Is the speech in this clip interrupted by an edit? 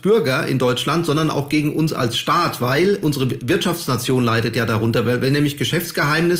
yes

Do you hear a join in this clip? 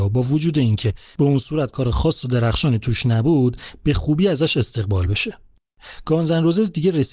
no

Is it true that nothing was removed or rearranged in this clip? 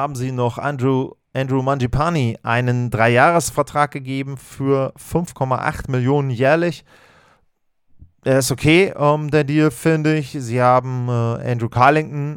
yes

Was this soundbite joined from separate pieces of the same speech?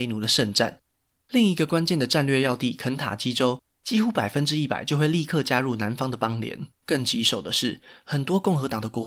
yes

